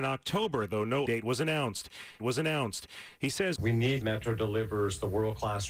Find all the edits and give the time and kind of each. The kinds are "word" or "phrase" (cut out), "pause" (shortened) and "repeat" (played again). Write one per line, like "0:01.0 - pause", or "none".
0:01.1 - word
0:02.2 - repeat
0:03.6 - word
0:04.0 - phrase

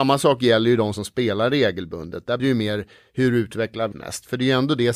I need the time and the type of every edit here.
0:00.9 - word
0:02.4 - word
0:03.9 - word

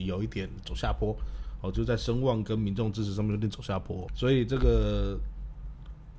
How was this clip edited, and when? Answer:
0:04.1 - word

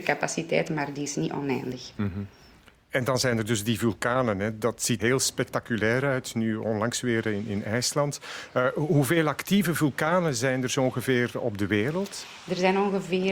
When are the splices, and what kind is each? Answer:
0:05.0 - word

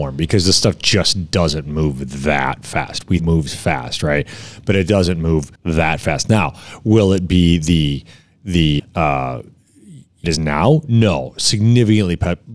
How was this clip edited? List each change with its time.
0:03.2 - phrase
0:05.6 - pause
0:08.8 - word
0:10.2 - phrase

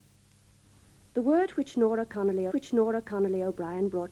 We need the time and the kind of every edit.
0:02.5 - repeat

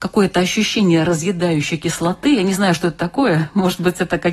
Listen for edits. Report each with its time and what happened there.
none

